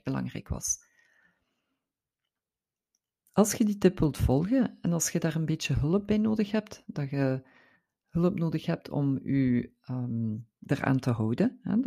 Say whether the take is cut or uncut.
uncut